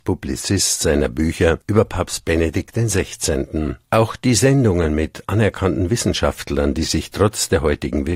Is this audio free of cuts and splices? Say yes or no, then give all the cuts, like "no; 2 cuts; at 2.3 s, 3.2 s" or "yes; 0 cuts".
no; 2 cuts; at 1.6 s, 3.8 s